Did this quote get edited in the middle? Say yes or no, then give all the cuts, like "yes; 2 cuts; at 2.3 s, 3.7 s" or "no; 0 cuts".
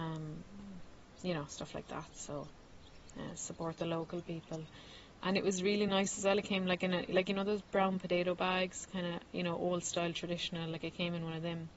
no; 0 cuts